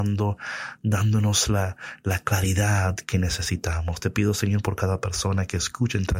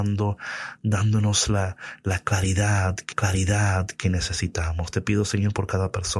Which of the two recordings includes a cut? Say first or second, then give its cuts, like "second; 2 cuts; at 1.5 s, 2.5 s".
second; 1 cut; at 3.1 s